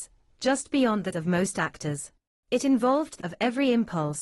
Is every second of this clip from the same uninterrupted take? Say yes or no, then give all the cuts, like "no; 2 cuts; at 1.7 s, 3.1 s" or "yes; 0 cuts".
no; 3 cuts; at 1.1 s, 2.3 s, 3.2 s